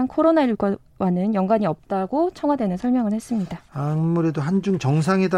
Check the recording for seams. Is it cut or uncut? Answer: uncut